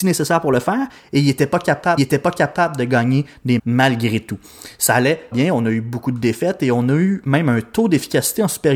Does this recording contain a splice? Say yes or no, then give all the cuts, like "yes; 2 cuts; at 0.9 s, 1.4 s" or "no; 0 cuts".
yes; 3 cuts; at 2.0 s, 3.6 s, 5.3 s